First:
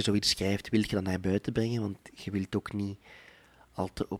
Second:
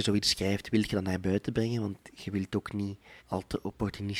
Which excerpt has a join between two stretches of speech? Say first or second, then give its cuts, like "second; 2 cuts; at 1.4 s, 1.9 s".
second; 1 cut; at 3.2 s